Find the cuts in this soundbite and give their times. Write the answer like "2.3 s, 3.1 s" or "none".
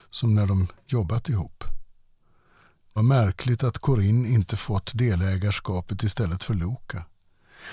3.0 s